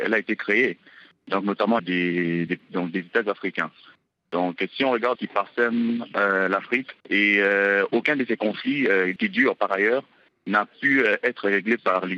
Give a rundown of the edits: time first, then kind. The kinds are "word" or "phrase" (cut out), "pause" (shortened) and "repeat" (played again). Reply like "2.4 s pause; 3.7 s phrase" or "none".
1.8 s word; 2.5 s word; 5.2 s phrase; 7.0 s pause; 9.2 s word